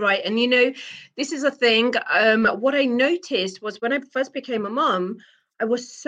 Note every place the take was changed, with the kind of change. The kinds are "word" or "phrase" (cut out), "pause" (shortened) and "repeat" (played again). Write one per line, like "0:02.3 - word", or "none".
none

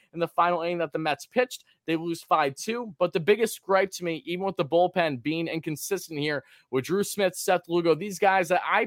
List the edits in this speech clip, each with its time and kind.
none

